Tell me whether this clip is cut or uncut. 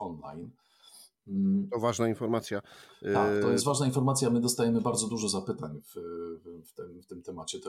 uncut